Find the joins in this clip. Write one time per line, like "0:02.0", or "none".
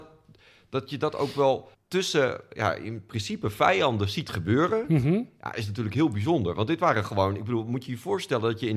0:01.7